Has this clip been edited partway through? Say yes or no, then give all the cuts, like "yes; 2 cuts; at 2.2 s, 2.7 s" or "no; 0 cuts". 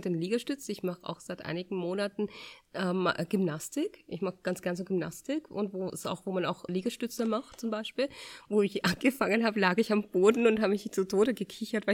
yes; 1 cut; at 6.7 s